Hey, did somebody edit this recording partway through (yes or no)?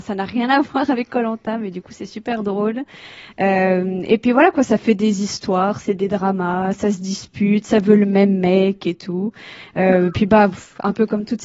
no